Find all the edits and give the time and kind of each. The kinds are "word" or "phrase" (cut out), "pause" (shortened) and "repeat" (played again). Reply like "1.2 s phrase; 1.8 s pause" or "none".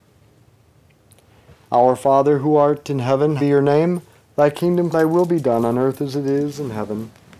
3.4 s word; 4.9 s word